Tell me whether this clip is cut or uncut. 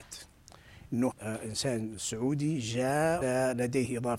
cut